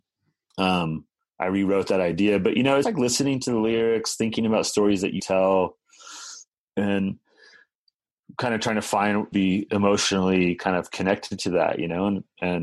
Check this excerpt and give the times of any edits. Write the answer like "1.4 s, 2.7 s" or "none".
2.8 s, 5.2 s, 6.5 s, 9.3 s